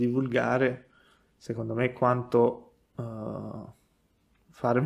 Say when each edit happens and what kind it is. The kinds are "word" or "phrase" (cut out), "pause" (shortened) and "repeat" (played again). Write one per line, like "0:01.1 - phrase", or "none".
none